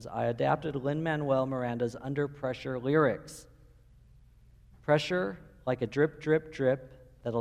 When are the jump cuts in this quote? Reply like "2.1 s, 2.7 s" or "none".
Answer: none